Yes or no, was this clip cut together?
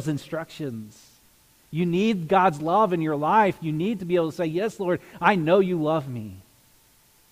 no